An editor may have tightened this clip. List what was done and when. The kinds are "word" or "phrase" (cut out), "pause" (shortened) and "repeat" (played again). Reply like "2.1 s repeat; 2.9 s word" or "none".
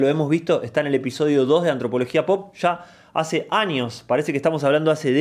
none